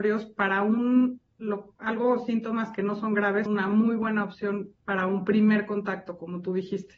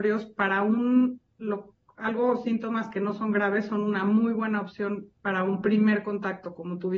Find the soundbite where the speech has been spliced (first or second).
first